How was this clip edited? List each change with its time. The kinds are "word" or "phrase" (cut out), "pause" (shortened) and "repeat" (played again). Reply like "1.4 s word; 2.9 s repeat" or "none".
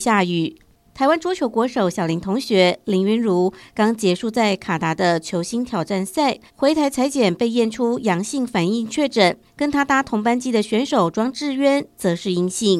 6.5 s pause; 9.5 s pause